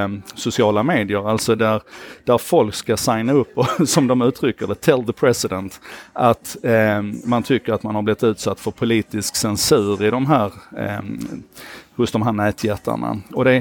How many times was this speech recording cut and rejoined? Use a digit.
0